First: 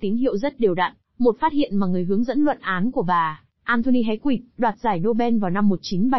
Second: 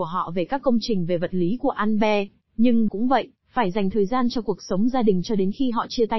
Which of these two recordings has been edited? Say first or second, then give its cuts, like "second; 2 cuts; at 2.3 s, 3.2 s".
second; 1 cut; at 2.9 s